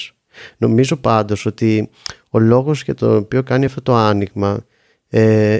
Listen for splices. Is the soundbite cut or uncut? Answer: uncut